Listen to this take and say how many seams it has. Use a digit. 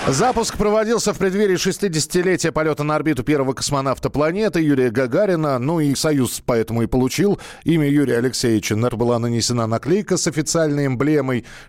2